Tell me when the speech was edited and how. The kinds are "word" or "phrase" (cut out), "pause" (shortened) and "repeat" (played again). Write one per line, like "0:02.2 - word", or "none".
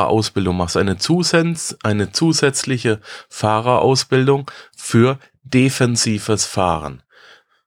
none